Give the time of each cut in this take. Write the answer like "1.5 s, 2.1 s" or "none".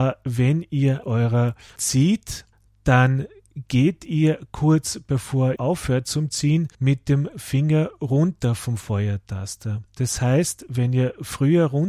1.0 s, 1.8 s, 2.5 s, 5.6 s, 6.7 s, 9.9 s